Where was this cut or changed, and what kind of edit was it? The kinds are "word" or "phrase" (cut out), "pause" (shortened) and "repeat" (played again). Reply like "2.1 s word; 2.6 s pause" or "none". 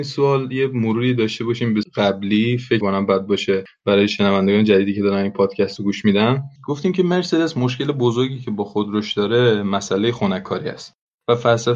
1.8 s phrase; 2.8 s word; 6.6 s pause

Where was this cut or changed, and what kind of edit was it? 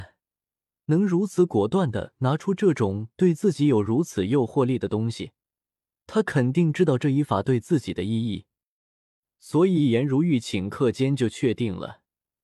none

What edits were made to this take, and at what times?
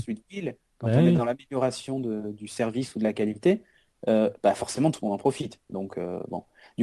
none

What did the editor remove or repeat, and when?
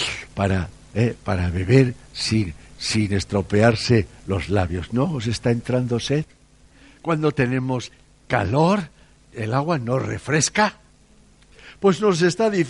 none

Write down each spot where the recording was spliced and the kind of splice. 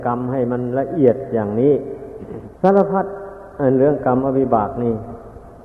2.6 s pause

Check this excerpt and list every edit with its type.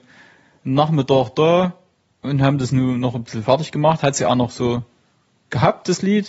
none

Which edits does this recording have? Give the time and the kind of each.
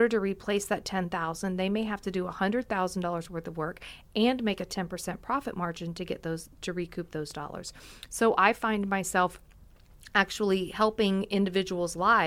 none

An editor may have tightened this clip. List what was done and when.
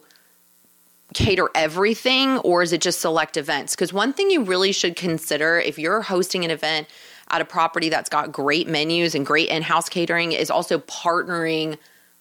none

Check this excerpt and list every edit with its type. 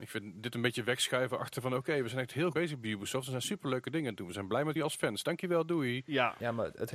2.5 s word; 4.8 s word

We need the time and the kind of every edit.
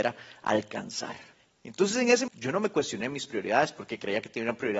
1.3 s pause; 2.3 s word

